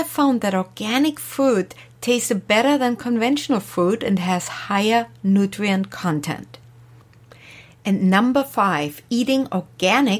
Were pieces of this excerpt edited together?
no; 0 cuts

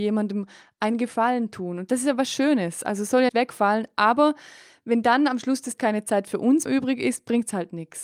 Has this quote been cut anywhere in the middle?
yes; 3 cuts; at 3.3 s, 5.8 s, 6.7 s

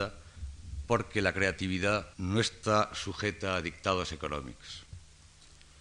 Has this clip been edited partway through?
yes; 1 cut; at 2.1 s

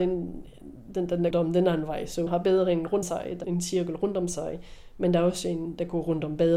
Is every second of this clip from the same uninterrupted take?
no; 4 cuts; at 1.3 s, 2.3 s, 3.0 s, 3.4 s

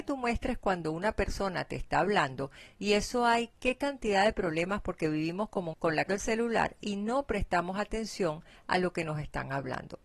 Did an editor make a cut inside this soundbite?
yes; 2 cuts; at 5.7 s, 6.1 s

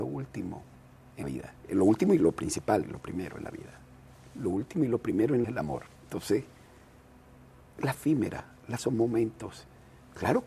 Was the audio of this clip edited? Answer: yes; 7 cuts; at 1.2 s, 1.6 s, 2.8 s, 5.4 s, 6.0 s, 7.9 s, 8.8 s

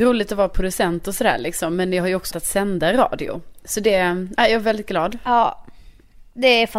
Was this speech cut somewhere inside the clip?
yes; 2 cuts; at 2.3 s, 4.4 s

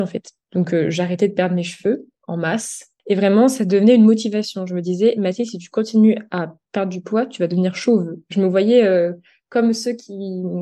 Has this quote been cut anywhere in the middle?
no; 0 cuts

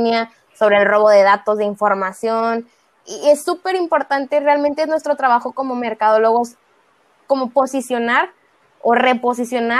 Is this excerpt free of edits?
yes; 0 cuts

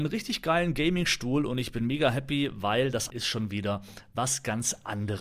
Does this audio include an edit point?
yes; 1 cut; at 3.1 s

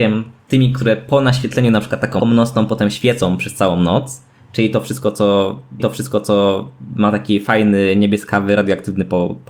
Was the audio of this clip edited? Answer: yes; 2 cuts; at 2.2 s, 5.8 s

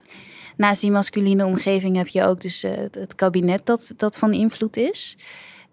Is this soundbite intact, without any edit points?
yes; 0 cuts

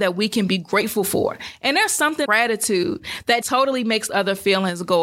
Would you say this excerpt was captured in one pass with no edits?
no; 3 cuts; at 2.3 s, 3.4 s, 4.1 s

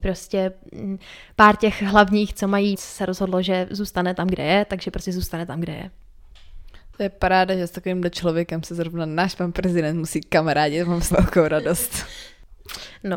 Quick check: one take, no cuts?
no; 2 cuts; at 2.7 s, 11.1 s

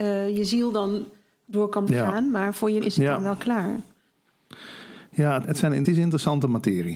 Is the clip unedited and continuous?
no; 4 cuts; at 1.9 s, 2.8 s, 5.4 s, 5.8 s

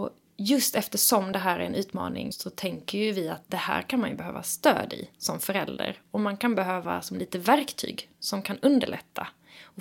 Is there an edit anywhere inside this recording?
no; 0 cuts

